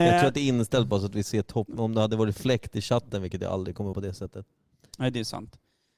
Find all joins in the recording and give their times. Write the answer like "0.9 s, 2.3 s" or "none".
2.4 s, 3.9 s